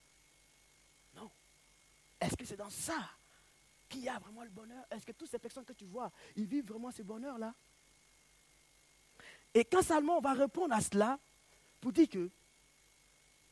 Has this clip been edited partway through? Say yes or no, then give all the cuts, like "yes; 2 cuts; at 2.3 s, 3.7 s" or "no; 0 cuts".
no; 0 cuts